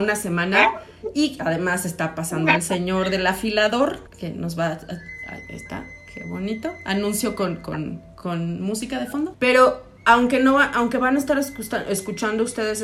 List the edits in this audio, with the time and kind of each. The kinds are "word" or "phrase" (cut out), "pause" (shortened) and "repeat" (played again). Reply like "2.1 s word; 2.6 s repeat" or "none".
4.1 s pause